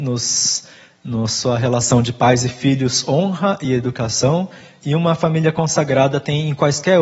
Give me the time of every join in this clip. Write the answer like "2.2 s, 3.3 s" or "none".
none